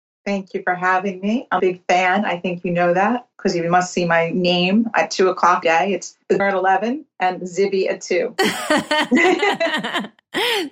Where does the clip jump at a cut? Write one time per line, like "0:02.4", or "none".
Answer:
0:01.6
0:03.3
0:05.6
0:06.4